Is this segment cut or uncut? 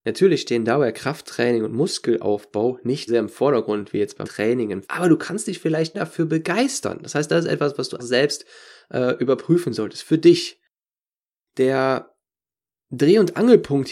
cut